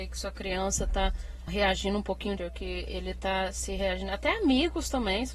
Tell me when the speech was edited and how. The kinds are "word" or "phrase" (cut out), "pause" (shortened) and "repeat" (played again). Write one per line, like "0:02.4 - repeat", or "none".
0:01.5 - word
0:02.4 - word